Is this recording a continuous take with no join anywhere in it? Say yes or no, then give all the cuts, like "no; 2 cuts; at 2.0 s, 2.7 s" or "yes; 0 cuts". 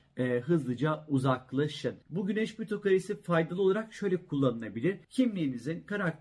no; 2 cuts; at 2.0 s, 5.0 s